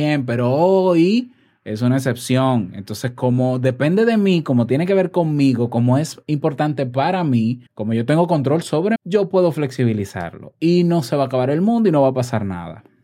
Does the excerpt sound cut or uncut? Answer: cut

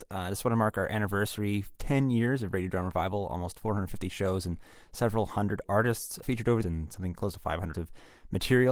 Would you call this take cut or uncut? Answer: cut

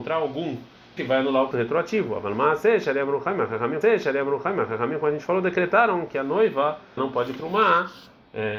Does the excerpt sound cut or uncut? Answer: cut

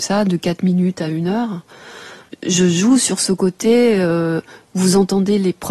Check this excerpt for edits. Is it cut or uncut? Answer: uncut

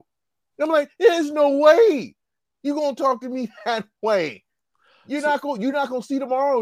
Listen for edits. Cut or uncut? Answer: uncut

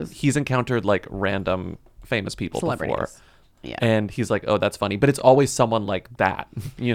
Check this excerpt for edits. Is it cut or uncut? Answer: uncut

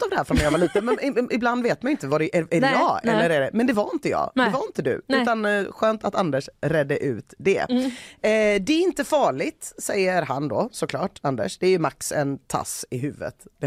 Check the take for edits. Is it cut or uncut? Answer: uncut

